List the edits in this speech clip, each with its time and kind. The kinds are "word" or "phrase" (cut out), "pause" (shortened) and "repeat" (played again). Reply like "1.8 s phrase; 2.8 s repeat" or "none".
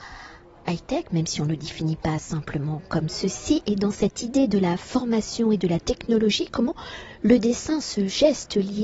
none